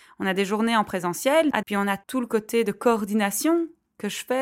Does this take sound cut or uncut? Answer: cut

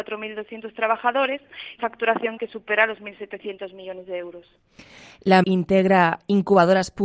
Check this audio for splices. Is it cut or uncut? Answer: cut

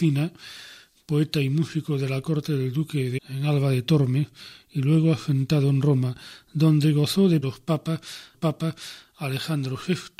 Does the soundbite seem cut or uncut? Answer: cut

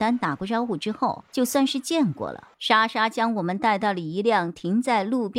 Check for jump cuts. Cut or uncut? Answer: cut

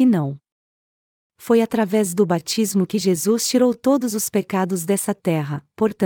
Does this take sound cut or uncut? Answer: uncut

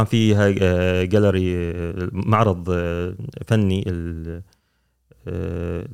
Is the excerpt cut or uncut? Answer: uncut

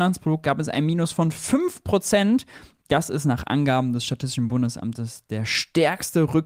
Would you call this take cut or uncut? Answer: uncut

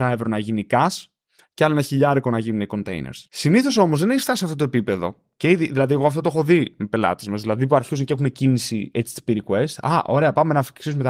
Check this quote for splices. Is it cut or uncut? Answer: cut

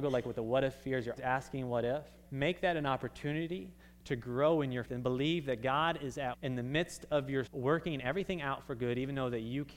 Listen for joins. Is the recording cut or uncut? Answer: cut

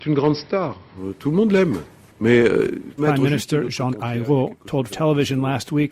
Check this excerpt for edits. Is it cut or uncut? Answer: cut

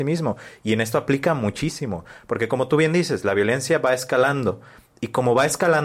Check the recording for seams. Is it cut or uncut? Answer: uncut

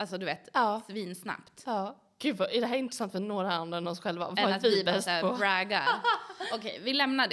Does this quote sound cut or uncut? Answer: uncut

